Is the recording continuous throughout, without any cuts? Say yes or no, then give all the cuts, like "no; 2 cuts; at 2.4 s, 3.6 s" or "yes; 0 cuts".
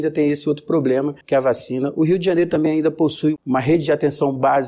no; 1 cut; at 1.2 s